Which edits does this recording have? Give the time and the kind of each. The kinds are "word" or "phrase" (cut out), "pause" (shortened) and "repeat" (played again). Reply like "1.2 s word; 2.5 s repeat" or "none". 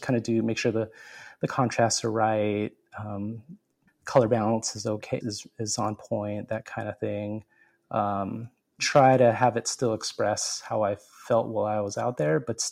3.9 s word; 5.2 s word; 8.8 s word